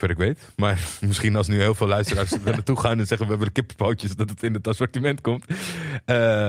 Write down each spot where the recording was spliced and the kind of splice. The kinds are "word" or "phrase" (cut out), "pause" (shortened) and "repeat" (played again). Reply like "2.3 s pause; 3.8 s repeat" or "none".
none